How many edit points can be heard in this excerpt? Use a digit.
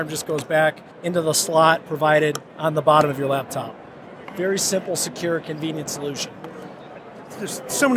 2